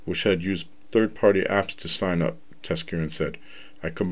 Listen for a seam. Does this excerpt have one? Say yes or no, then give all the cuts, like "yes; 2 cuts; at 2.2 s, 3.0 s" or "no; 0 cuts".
no; 0 cuts